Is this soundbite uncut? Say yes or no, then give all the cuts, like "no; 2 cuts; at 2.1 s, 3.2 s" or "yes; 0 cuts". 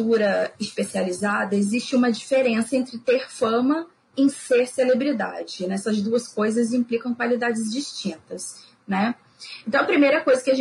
yes; 0 cuts